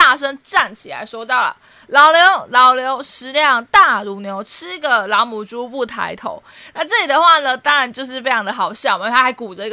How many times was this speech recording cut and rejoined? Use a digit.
0